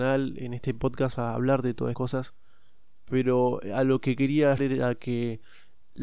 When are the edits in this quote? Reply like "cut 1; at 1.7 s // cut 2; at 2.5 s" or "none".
cut 1; at 1.1 s // cut 2; at 1.9 s // cut 3; at 4.6 s